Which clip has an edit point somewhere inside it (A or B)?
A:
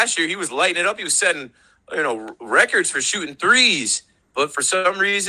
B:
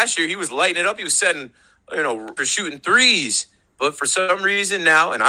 B